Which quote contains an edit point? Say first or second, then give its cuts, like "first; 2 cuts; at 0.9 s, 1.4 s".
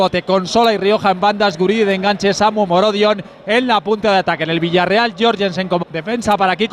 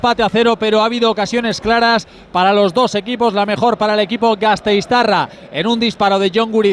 first; 1 cut; at 5.8 s